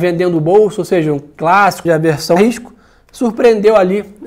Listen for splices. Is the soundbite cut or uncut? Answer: cut